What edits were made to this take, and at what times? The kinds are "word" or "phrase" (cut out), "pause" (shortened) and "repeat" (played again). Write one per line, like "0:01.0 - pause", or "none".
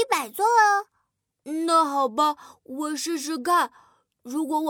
none